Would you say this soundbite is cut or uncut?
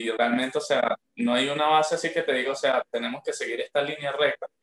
uncut